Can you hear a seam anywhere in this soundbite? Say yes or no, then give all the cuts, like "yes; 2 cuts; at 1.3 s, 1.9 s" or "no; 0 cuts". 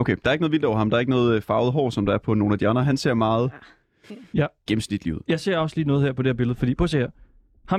no; 0 cuts